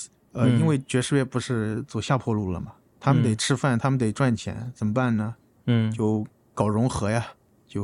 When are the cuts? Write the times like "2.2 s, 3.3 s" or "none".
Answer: none